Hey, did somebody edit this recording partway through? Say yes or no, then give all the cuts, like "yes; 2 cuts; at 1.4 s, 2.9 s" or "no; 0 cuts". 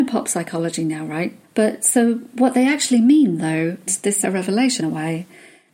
yes; 4 cuts; at 1.4 s, 3.9 s, 4.2 s, 4.8 s